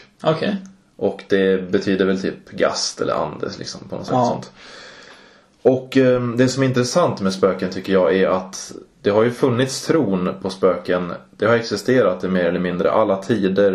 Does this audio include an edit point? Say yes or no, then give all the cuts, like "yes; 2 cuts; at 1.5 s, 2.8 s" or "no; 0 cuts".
no; 0 cuts